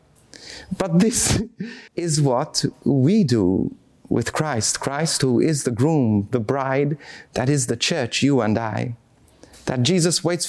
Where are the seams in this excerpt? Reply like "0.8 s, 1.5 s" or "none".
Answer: 1.9 s